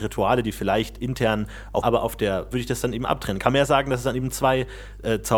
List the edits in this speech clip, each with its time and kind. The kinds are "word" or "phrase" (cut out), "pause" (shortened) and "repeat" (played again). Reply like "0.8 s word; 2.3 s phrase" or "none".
1.8 s phrase; 2.5 s word